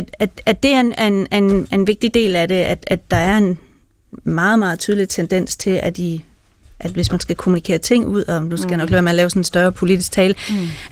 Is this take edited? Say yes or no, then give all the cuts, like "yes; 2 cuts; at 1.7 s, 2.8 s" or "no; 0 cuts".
no; 0 cuts